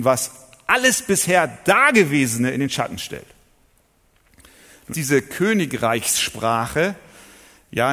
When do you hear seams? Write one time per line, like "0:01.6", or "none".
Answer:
0:04.9